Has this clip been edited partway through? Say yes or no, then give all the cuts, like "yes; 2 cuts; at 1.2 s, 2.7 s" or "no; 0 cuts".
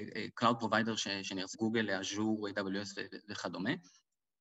yes; 1 cut; at 1.5 s